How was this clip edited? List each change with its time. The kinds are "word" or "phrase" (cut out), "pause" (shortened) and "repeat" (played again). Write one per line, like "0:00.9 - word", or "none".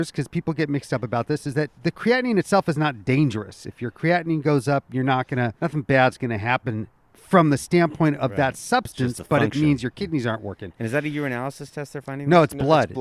0:05.6 - pause